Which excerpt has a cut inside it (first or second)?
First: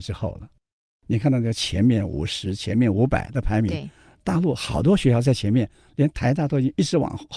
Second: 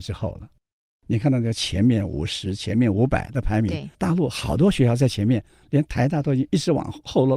second